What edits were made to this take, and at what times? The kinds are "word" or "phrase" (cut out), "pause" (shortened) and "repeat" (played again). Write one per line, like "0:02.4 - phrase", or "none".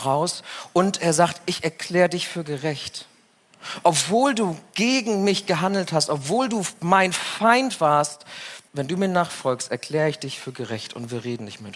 0:08.7 - pause